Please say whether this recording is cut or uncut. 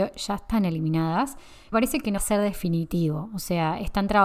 cut